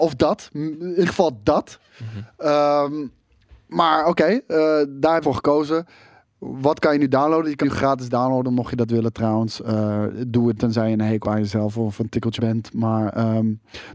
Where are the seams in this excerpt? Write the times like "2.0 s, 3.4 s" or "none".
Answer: 1.0 s, 5.2 s, 7.6 s, 10.6 s, 11.2 s, 12.4 s